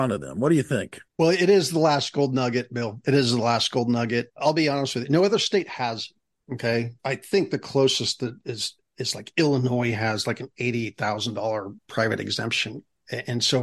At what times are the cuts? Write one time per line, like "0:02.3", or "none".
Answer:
0:01.1
0:11.8